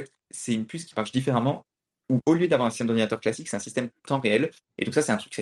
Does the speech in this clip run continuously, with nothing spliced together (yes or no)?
yes